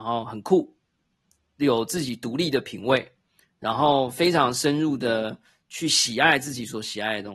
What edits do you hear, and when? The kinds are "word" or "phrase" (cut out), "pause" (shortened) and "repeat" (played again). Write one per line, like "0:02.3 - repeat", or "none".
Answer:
none